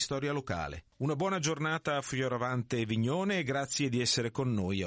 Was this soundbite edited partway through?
no; 0 cuts

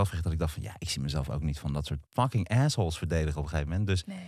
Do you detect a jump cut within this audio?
yes; 1 cut; at 2.1 s

